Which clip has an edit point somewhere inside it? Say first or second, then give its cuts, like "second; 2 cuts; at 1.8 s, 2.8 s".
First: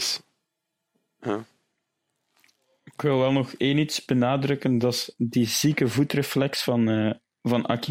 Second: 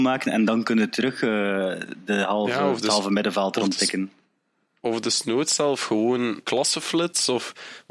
second; 1 cut; at 6.4 s